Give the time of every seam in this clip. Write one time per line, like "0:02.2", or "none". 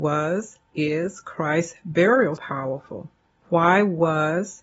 0:02.4

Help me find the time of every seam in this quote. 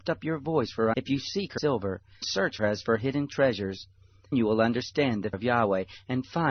0:00.9
0:01.6
0:02.2
0:02.6
0:04.3
0:05.3

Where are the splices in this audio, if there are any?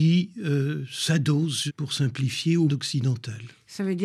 0:01.7
0:02.7

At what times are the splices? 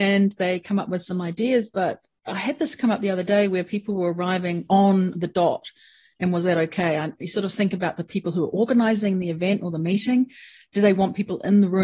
none

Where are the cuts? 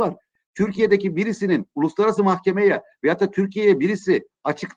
none

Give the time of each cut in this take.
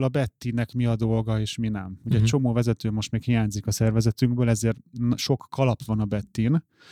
none

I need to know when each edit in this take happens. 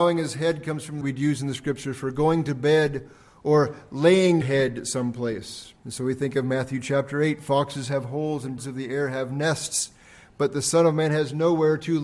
0:01.0
0:04.4
0:05.8
0:08.6

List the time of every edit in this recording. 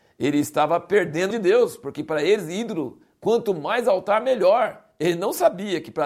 0:01.3

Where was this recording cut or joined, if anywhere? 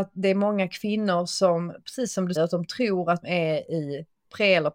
0:02.4
0:03.2

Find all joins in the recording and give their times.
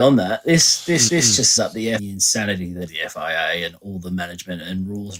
0:01.1
0:01.6
0:02.0
0:02.9

